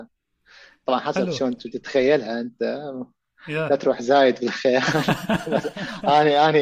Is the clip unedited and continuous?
yes; 0 cuts

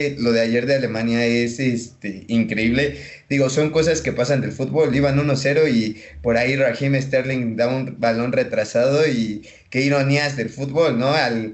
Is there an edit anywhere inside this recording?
no; 0 cuts

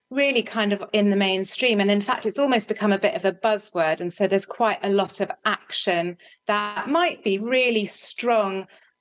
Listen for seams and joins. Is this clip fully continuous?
yes; 0 cuts

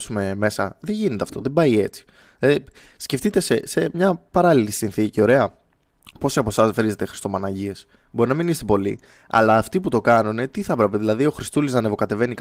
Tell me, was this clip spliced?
no; 0 cuts

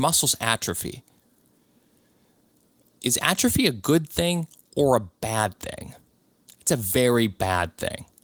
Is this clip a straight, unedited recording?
yes; 0 cuts

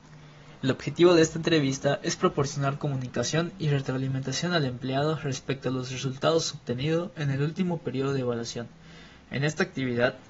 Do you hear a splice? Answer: no; 0 cuts

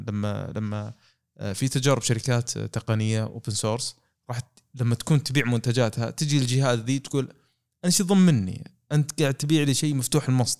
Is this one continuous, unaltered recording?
yes; 0 cuts

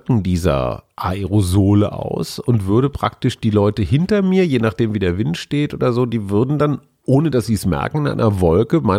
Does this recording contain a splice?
no; 0 cuts

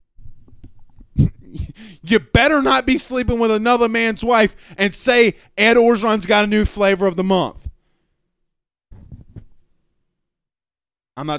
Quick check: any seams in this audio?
no; 0 cuts

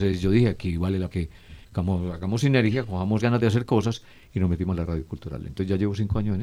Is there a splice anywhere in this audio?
yes; 3 cuts; at 1.1 s, 1.6 s, 3.2 s

